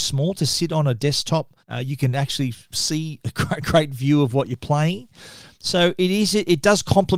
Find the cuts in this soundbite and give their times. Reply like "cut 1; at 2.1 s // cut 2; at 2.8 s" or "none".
cut 1; at 1.6 s